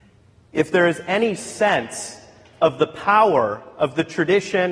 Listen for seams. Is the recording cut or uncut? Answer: uncut